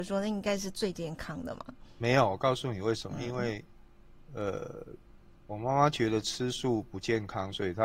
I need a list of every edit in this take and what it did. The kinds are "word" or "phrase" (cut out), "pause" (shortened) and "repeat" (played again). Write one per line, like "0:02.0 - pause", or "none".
none